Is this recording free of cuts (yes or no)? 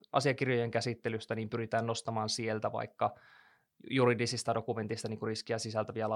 yes